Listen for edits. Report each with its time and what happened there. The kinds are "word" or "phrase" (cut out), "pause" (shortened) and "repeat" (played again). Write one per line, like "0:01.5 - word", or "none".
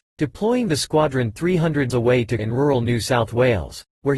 0:01.9 - word
0:02.4 - word